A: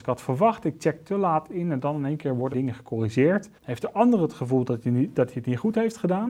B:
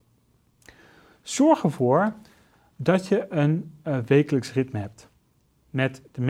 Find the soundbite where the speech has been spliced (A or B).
A